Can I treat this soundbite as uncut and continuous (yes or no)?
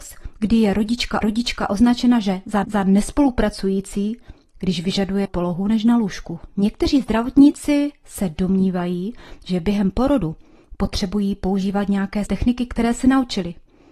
no